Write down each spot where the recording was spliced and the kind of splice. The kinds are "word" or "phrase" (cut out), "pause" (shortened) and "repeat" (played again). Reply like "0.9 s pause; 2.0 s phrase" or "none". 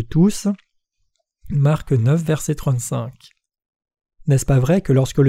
none